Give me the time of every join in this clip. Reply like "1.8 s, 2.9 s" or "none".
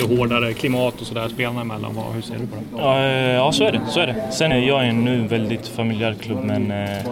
4.5 s